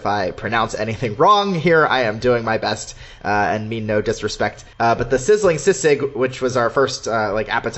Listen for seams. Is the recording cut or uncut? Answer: cut